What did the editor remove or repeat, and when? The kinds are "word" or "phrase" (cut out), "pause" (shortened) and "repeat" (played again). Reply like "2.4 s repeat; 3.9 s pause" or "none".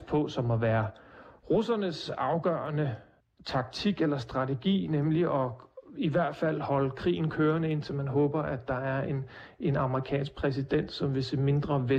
3.2 s pause